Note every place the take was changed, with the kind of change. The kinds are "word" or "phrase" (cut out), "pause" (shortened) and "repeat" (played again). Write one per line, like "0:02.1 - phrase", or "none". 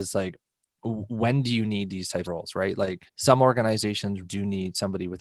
0:02.2 - word
0:03.1 - pause
0:04.2 - word